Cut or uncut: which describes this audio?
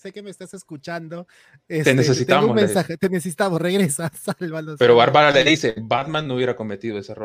uncut